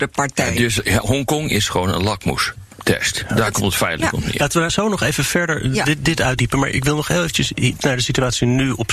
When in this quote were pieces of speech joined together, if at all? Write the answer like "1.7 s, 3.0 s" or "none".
none